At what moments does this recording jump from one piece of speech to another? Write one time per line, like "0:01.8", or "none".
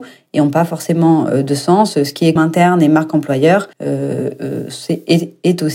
0:02.4
0:03.7